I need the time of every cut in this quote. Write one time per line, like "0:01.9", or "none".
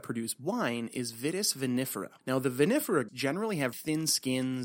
0:02.2
0:03.1
0:03.7